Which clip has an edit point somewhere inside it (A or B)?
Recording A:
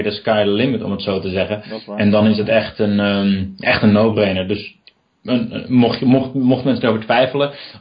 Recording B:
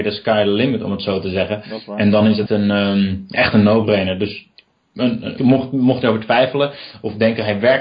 B